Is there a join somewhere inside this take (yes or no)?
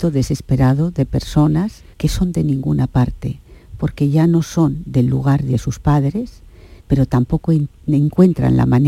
yes